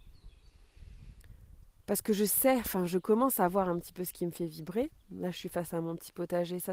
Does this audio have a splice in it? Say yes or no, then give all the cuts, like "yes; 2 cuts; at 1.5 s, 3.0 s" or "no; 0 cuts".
no; 0 cuts